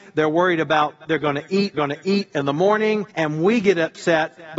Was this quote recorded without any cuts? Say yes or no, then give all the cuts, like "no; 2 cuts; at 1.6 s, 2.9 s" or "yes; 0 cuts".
no; 3 cuts; at 1.0 s, 1.7 s, 3.1 s